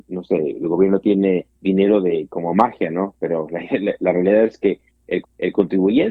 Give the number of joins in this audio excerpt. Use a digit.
2